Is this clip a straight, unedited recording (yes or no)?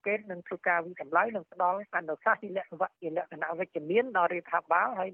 no